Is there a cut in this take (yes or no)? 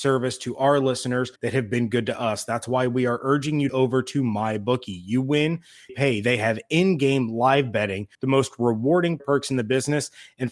yes